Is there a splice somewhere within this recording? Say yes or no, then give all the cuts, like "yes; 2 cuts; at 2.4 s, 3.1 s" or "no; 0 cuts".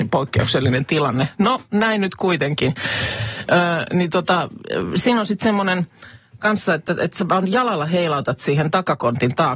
no; 0 cuts